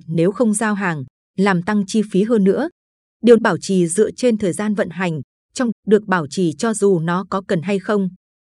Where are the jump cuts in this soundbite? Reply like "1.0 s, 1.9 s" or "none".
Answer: 3.4 s, 5.7 s